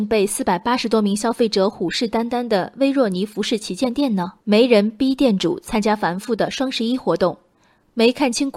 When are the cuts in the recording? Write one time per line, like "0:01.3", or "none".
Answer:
0:04.4